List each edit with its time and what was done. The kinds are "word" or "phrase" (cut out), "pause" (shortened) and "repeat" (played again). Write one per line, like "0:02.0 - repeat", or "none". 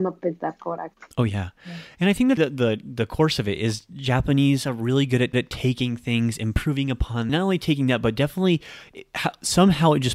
0:01.1 - pause
0:02.4 - word
0:05.3 - repeat
0:07.3 - phrase